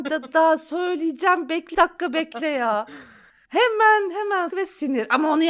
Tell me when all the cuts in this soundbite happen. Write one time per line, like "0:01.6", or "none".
0:01.7
0:04.5